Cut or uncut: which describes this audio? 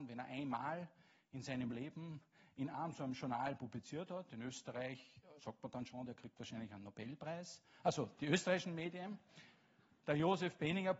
cut